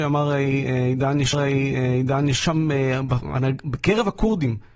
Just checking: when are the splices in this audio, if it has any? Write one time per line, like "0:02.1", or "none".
0:01.3